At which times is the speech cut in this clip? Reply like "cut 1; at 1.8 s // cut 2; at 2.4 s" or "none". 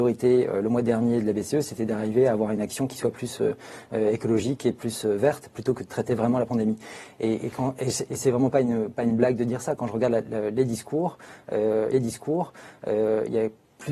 cut 1; at 11.9 s